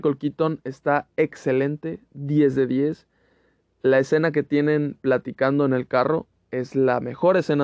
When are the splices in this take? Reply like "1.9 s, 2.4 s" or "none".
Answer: none